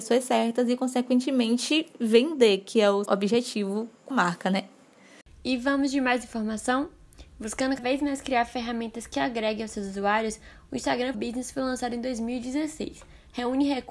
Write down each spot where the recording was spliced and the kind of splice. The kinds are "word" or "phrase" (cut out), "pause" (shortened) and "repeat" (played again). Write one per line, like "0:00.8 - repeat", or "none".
0:03.1 - word
0:04.1 - word
0:07.8 - word
0:11.1 - word